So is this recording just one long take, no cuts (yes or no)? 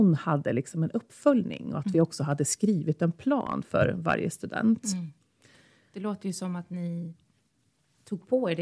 yes